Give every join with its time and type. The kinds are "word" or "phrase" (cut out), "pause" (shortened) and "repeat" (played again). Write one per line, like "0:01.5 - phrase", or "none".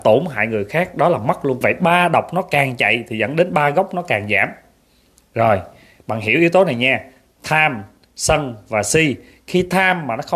0:01.6 - phrase